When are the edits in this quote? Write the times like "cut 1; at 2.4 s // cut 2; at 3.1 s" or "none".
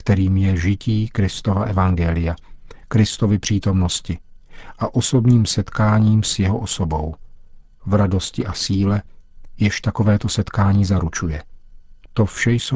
none